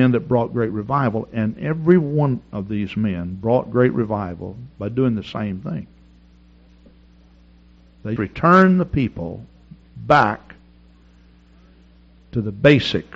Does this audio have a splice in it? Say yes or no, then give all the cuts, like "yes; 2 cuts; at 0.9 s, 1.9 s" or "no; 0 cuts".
yes; 1 cut; at 8.2 s